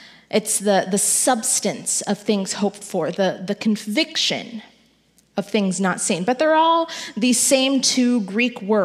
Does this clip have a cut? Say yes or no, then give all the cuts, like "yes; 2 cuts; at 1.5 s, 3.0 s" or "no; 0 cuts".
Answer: no; 0 cuts